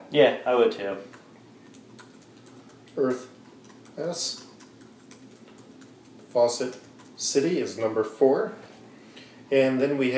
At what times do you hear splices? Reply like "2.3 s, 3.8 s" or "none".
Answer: none